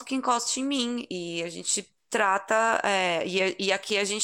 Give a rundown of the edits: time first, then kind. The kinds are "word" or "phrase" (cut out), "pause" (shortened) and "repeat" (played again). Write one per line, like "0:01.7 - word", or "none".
0:02.0 - pause